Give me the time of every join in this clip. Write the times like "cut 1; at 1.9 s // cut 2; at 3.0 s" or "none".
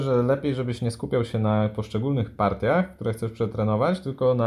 none